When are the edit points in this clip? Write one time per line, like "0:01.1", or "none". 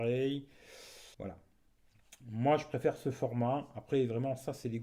0:01.1